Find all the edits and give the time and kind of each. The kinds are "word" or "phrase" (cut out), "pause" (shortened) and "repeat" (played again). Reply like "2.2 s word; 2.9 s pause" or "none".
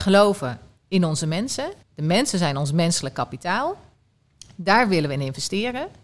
1.8 s pause

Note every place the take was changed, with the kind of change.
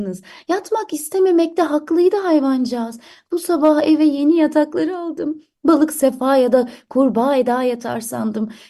none

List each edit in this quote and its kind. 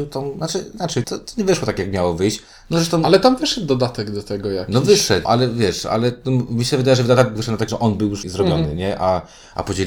1.0 s word; 5.3 s word; 7.4 s word; 7.7 s word; 8.2 s word

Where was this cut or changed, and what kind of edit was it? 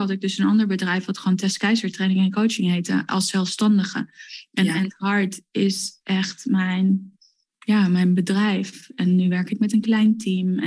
none

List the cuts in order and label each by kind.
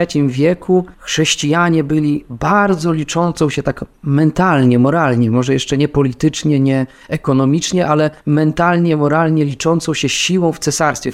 0.9 s pause; 8.2 s pause

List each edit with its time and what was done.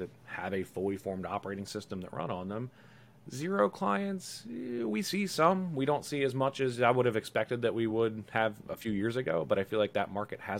none

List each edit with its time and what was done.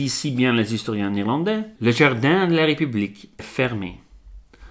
1.8 s pause; 3.4 s word

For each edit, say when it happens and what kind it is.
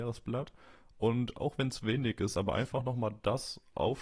none

